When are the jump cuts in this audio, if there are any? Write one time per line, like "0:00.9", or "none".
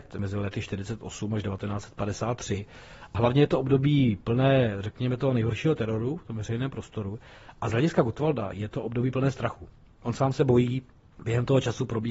none